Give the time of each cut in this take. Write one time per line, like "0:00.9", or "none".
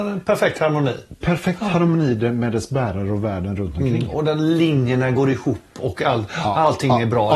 none